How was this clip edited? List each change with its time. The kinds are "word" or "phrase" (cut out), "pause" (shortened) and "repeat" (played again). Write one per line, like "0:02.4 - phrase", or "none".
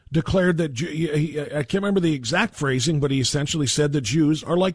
none